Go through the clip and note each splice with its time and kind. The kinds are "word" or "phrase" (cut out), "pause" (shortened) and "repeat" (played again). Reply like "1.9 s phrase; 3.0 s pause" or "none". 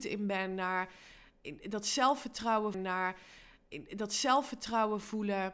2.7 s repeat